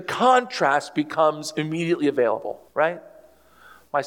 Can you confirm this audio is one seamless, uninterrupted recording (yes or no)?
no